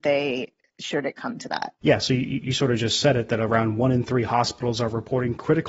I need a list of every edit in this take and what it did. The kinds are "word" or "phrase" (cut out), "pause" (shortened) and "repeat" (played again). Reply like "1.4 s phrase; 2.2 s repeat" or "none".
none